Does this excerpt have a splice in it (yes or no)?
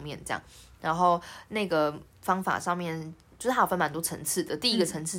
no